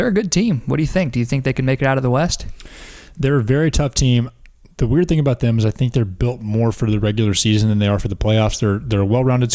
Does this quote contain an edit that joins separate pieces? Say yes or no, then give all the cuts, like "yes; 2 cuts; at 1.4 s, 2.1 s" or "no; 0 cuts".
no; 0 cuts